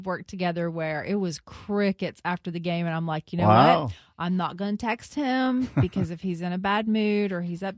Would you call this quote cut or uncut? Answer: uncut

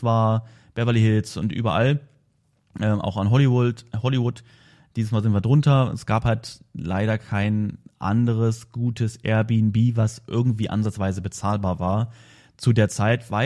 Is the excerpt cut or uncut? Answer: uncut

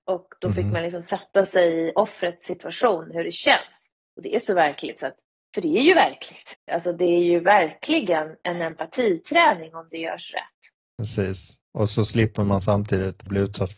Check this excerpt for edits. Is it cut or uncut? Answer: cut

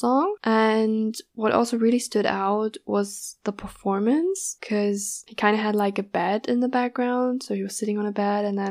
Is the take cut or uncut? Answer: uncut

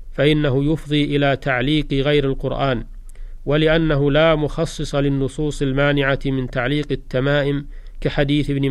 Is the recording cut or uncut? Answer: uncut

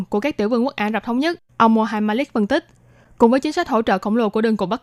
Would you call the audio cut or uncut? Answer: uncut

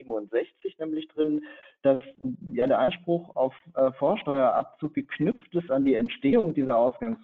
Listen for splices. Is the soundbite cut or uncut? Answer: uncut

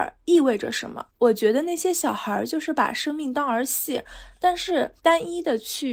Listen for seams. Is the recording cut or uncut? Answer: cut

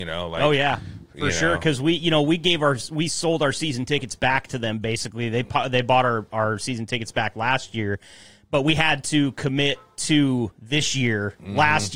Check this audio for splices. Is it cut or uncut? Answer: uncut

